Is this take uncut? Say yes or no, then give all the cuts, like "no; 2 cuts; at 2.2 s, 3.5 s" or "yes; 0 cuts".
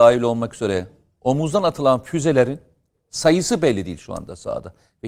yes; 0 cuts